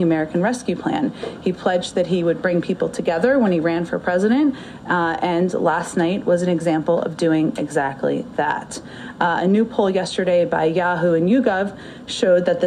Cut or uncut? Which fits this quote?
uncut